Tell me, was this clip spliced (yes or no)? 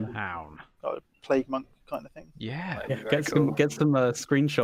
no